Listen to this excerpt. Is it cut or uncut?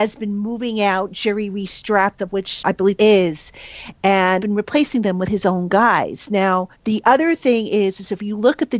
cut